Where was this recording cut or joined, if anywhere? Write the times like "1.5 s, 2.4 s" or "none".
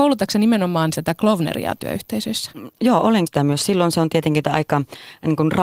1.0 s, 2.8 s, 3.3 s, 4.4 s